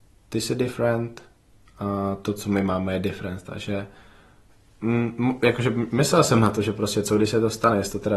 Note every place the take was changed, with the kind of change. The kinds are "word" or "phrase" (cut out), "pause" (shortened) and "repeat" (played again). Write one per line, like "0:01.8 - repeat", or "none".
none